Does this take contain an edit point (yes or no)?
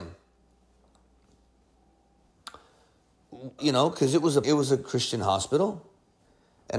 yes